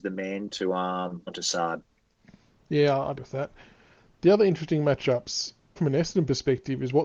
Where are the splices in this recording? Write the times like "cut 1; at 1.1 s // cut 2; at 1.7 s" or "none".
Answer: cut 1; at 1.3 s // cut 2; at 3.2 s // cut 3; at 5.8 s